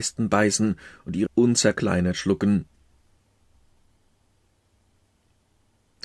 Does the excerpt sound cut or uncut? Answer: cut